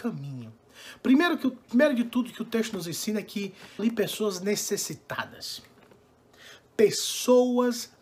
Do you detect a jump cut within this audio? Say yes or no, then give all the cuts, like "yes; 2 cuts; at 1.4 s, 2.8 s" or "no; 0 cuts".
yes; 1 cut; at 3.8 s